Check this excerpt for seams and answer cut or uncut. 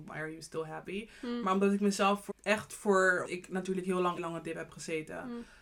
cut